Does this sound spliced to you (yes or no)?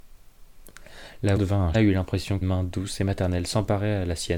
yes